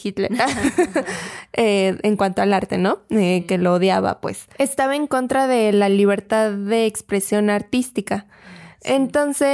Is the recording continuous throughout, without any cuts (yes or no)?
yes